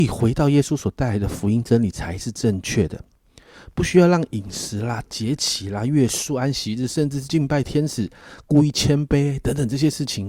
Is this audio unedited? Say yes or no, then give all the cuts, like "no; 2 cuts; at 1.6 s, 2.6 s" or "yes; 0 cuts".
yes; 0 cuts